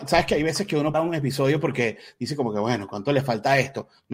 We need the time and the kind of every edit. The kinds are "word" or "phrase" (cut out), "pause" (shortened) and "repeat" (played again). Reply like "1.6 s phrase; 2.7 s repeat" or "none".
0.9 s word